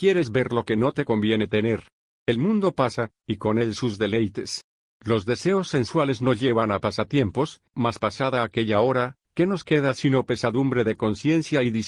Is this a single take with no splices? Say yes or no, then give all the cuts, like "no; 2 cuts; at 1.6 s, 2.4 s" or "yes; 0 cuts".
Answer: yes; 0 cuts